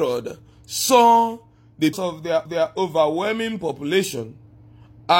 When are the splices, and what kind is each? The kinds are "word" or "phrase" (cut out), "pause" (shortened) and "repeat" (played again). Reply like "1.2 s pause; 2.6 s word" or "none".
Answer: 1.9 s phrase; 2.5 s repeat